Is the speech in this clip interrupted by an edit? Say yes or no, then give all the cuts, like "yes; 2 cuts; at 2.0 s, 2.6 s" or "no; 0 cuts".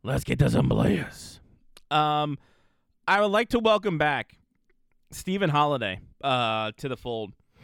yes; 1 cut; at 6.1 s